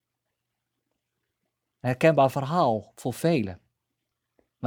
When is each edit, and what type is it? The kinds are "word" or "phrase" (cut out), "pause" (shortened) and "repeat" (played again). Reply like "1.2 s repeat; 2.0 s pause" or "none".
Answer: none

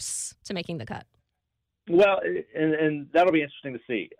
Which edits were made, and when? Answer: none

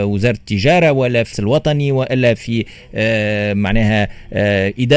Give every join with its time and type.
1.3 s word

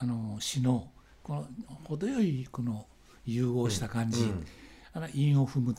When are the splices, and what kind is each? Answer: none

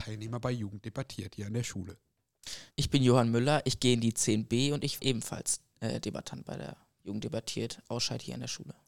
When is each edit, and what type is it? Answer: 2.7 s pause; 5.0 s word

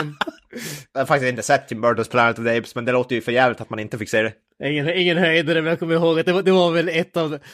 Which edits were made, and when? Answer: none

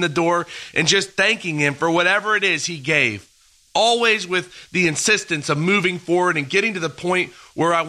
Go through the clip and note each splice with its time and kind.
none

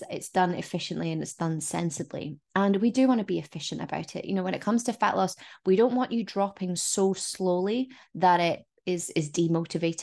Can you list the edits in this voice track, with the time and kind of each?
none

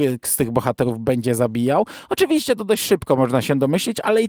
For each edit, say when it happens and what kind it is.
none

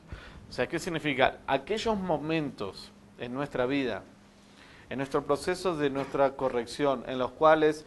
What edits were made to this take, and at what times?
none

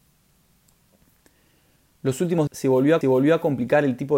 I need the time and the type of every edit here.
2.5 s word; 3.0 s repeat

